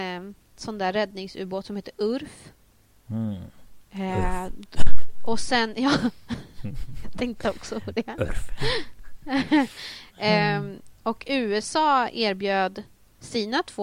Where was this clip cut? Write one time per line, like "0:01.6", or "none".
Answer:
none